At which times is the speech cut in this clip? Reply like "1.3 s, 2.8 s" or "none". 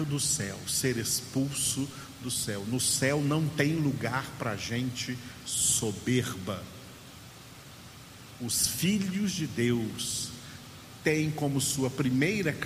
none

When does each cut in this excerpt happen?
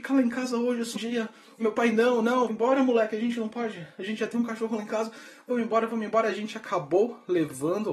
0.9 s, 1.6 s, 2.5 s

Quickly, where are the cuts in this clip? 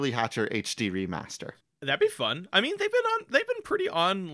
1.6 s

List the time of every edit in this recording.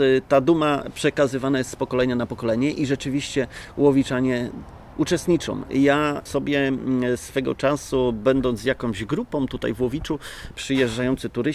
4.9 s, 6.3 s

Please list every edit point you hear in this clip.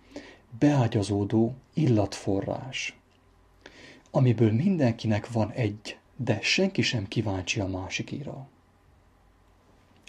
1.6 s, 6.0 s

